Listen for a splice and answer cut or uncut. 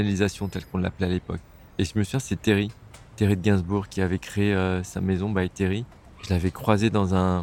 uncut